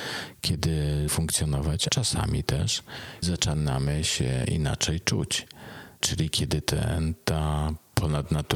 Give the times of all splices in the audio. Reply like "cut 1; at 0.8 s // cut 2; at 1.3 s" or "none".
cut 1; at 1.1 s // cut 2; at 1.9 s // cut 3; at 3.2 s // cut 4; at 6.0 s